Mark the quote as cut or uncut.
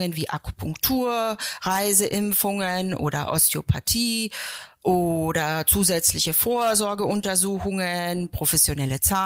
uncut